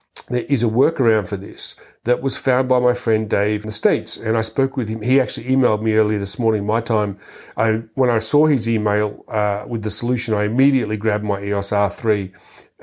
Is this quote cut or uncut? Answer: cut